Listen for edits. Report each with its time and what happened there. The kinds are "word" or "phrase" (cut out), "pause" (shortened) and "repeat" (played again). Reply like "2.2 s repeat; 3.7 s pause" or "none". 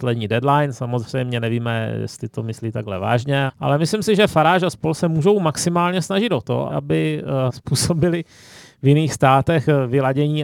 3.5 s word; 6.7 s word; 7.5 s word